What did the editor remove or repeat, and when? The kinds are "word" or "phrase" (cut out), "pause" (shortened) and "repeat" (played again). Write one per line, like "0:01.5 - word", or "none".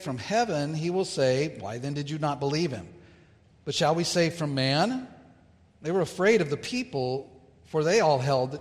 none